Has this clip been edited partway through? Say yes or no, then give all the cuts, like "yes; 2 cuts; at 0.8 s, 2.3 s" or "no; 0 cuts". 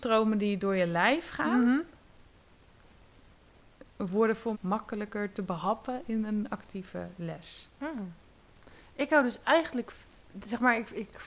yes; 1 cut; at 4.5 s